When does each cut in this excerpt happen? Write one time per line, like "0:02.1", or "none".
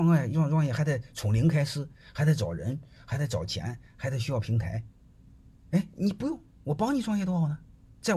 none